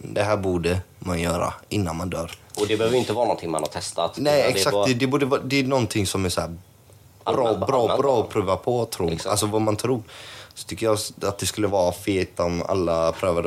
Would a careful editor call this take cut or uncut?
uncut